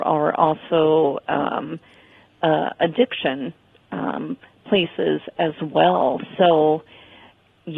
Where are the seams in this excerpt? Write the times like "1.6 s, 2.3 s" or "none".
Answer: none